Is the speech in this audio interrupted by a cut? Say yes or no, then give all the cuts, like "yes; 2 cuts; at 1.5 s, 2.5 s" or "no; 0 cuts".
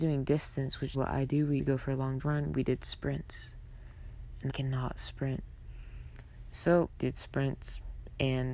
yes; 5 cuts; at 0.9 s, 1.6 s, 2.2 s, 4.5 s, 7.0 s